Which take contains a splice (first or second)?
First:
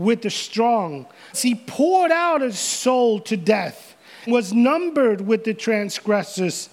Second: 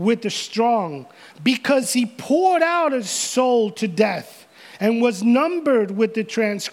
first